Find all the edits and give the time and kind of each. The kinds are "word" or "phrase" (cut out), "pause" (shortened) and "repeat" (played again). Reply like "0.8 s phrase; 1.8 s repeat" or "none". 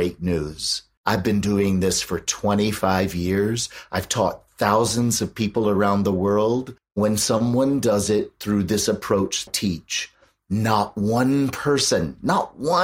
1.0 s pause; 6.8 s pause; 9.5 s phrase